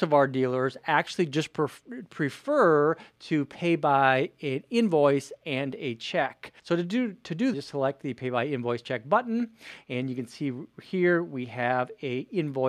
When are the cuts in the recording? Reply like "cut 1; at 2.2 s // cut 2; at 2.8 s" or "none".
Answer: cut 1; at 6.6 s // cut 2; at 7.5 s